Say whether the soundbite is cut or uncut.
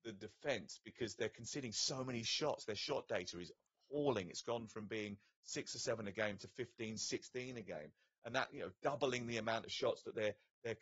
uncut